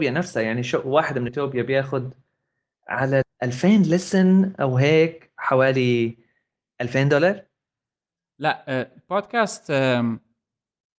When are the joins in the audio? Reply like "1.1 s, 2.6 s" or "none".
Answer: 1.3 s, 3.2 s

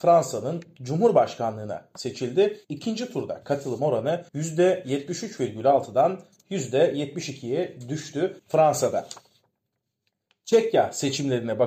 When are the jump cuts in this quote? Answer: 2.6 s, 4.3 s, 8.4 s

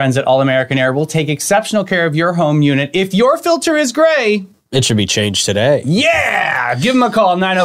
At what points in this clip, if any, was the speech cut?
none

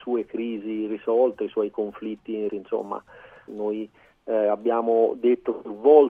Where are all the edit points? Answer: 2.5 s, 3.5 s

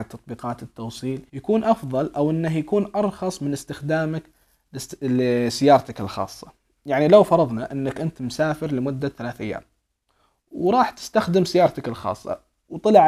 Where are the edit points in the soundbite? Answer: 1.3 s

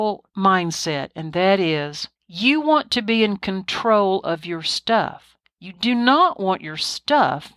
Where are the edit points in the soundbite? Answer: 2.2 s

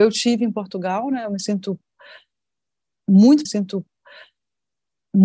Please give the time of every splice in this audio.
3.5 s

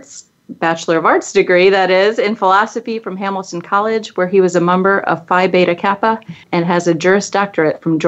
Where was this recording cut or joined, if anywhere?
6.4 s

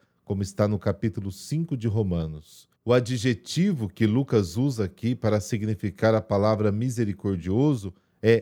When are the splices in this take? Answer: 2.8 s

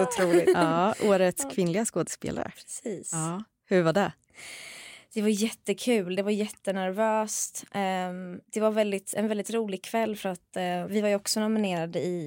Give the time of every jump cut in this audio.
8.4 s, 10.9 s

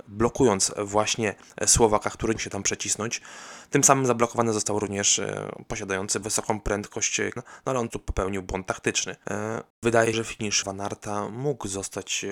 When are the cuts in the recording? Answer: 2.4 s, 6.2 s, 7.4 s, 7.9 s, 10.1 s, 10.6 s

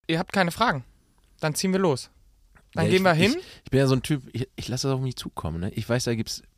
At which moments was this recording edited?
none

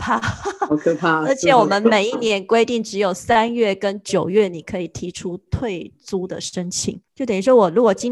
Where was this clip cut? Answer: 7.1 s

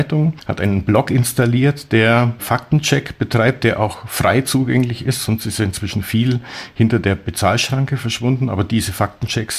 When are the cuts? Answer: none

